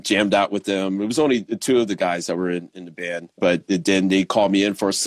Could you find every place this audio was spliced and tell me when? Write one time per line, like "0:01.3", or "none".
0:03.3